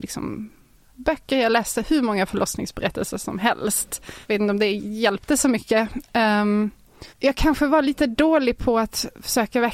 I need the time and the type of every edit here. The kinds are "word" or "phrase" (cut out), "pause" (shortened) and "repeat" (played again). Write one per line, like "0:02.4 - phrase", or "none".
0:04.2 - pause
0:07.1 - pause

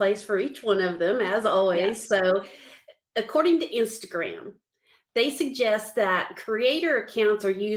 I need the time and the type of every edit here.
none

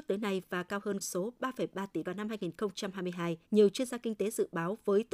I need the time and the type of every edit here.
0:01.0 - word
0:02.1 - phrase
0:03.4 - pause

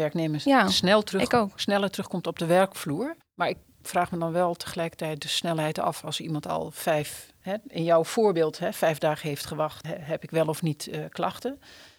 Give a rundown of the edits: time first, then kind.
0:03.2 - pause
0:09.8 - word

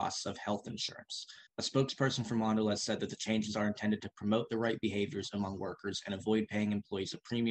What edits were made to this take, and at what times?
0:01.5 - pause

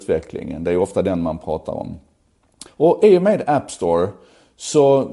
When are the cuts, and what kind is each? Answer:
0:02.7 - pause

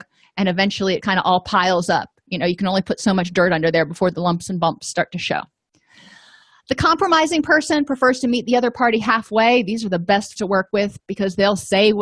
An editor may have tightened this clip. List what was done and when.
0:01.0 - word
0:10.4 - word

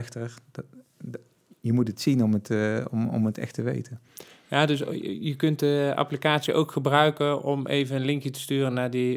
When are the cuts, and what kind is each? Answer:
none

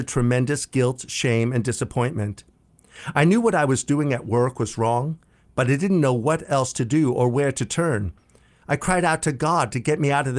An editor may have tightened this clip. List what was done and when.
none

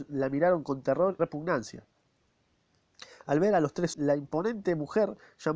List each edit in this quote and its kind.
0:01.2 - word
0:03.9 - word

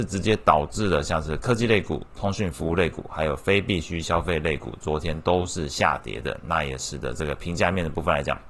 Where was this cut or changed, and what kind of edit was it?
none

